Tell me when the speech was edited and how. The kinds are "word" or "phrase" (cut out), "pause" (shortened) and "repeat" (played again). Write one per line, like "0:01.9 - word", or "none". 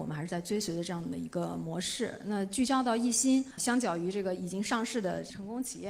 0:03.6 - word